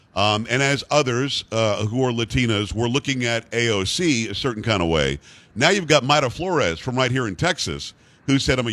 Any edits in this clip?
no; 0 cuts

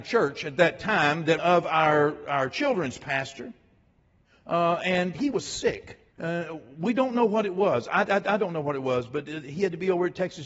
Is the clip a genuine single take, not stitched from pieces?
no; 3 cuts; at 1.4 s, 5.1 s, 6.1 s

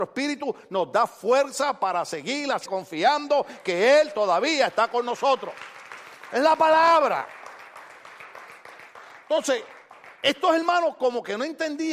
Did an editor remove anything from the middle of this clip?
yes; 2 cuts; at 2.6 s, 10.2 s

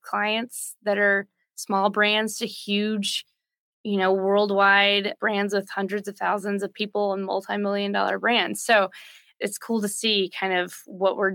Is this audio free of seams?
yes; 0 cuts

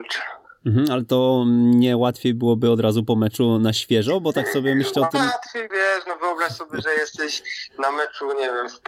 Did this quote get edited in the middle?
yes; 1 cut; at 5.7 s

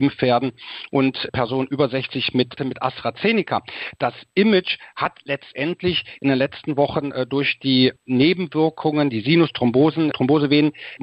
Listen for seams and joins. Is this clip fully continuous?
no; 2 cuts; at 2.6 s, 10.1 s

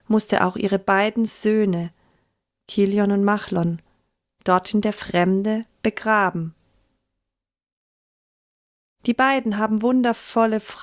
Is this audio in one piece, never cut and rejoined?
yes; 0 cuts

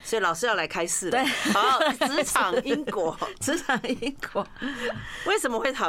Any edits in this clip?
no; 0 cuts

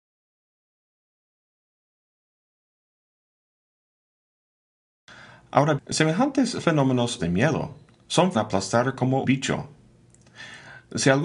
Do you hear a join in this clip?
yes; 4 cuts; at 5.8 s, 7.2 s, 8.3 s, 9.2 s

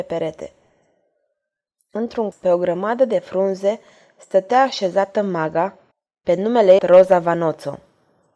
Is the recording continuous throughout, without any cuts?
no; 3 cuts; at 2.3 s, 5.9 s, 6.8 s

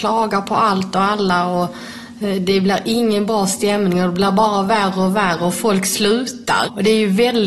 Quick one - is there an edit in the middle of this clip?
no; 0 cuts

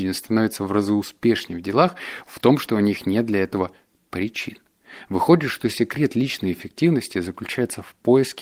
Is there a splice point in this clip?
no; 0 cuts

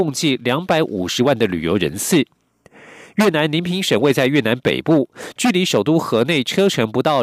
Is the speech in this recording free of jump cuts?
yes; 0 cuts

